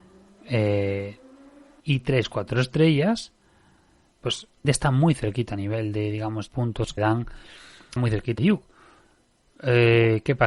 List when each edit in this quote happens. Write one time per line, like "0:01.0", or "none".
0:01.8
0:04.6
0:06.5
0:07.0
0:08.0
0:08.4